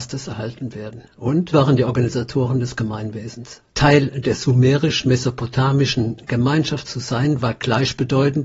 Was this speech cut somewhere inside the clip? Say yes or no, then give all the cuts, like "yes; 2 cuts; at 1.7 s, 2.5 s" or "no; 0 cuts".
yes; 2 cuts; at 1.5 s, 3.7 s